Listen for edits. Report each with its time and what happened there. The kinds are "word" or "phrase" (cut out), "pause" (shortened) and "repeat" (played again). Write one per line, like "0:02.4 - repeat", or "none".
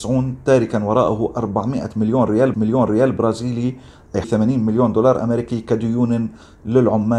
0:02.5 - repeat
0:04.2 - word